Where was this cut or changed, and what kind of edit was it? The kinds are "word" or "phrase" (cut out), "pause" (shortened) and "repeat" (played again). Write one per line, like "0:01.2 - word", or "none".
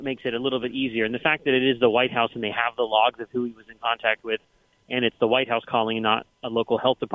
none